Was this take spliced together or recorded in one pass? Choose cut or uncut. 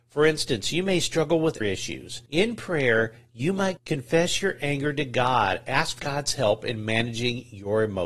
cut